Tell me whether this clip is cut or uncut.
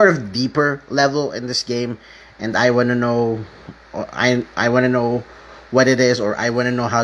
uncut